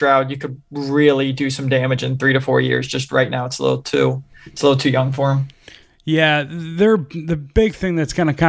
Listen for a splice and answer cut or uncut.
uncut